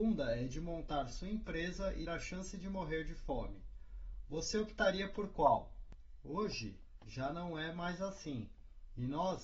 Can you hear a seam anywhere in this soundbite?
yes; 1 cut; at 2.1 s

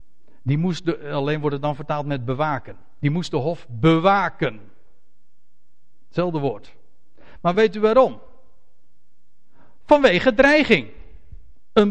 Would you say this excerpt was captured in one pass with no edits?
yes; 0 cuts

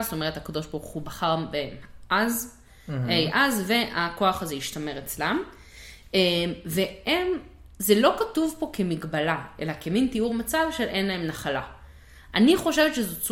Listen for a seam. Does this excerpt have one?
no; 0 cuts

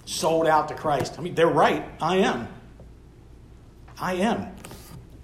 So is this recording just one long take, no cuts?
yes; 0 cuts

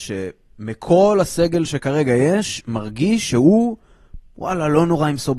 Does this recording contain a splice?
no; 0 cuts

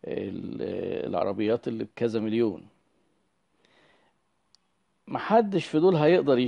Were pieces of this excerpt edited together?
no; 0 cuts

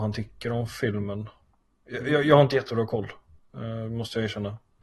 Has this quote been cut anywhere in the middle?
no; 0 cuts

